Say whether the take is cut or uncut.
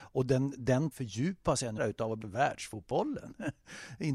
cut